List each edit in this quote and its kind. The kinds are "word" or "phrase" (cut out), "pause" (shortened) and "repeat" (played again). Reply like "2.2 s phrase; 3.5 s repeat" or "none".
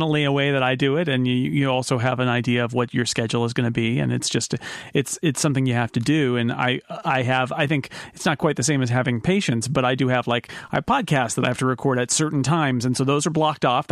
none

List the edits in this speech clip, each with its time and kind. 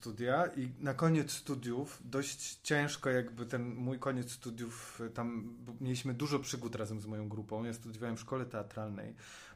none

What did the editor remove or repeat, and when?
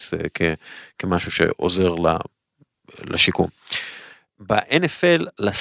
none

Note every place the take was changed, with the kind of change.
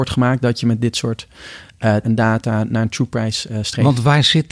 2.0 s word

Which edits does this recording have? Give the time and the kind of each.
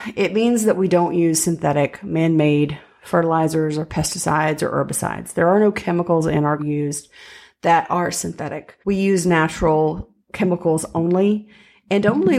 6.6 s phrase; 8.8 s pause; 10.2 s pause

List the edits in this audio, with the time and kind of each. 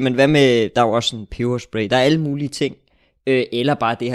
none

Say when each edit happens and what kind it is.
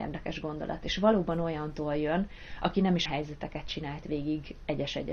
3.1 s word

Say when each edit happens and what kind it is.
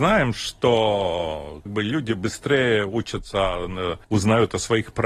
1.7 s word; 4.0 s pause

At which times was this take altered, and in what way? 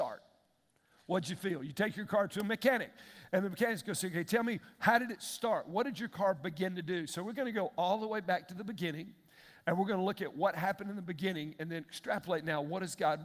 none

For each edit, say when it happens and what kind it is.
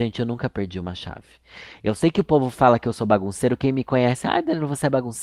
none

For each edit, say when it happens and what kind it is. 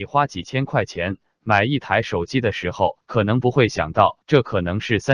3.0 s pause; 4.2 s pause

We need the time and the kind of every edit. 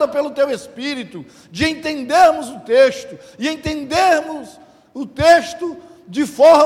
none

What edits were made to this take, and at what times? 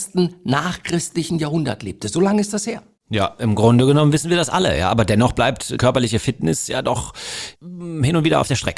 5.8 s word; 7.6 s pause

